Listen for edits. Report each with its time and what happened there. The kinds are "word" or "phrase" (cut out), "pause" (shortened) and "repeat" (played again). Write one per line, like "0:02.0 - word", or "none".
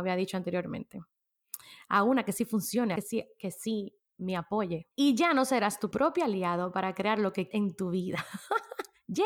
0:03.0 - phrase
0:04.9 - pause
0:05.9 - phrase
0:07.5 - word